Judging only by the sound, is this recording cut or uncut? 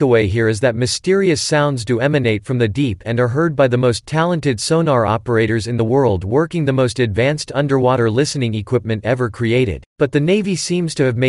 cut